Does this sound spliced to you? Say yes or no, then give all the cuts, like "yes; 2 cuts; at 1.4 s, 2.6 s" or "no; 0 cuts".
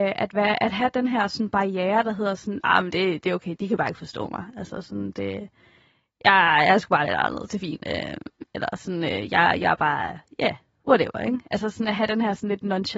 yes; 1 cut; at 3.6 s